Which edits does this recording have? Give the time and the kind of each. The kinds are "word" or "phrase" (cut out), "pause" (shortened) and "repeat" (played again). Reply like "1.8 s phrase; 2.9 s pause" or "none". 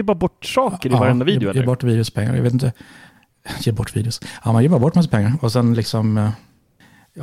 none